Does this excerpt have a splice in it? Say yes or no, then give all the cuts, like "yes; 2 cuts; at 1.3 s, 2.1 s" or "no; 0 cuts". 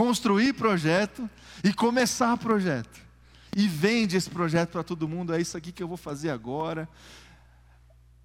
no; 0 cuts